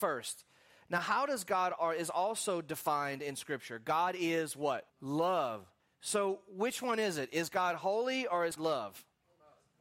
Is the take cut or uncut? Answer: cut